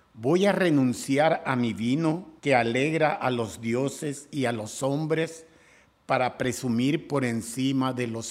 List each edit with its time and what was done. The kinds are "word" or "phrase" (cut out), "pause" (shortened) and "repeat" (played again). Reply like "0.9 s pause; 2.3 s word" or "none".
2.4 s pause